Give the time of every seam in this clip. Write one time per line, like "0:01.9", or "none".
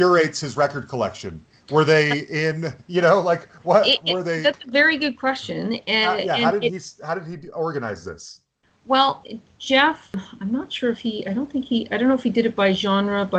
none